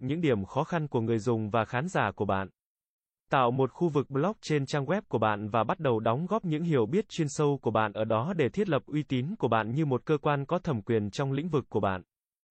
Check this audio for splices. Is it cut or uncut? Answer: uncut